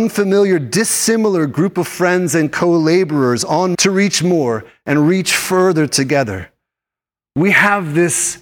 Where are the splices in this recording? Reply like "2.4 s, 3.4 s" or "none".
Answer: 3.7 s